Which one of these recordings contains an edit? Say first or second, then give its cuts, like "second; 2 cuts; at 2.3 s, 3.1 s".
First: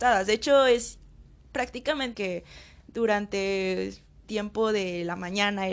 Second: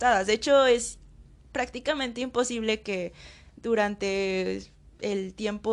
first; 2 cuts; at 2.1 s, 4.2 s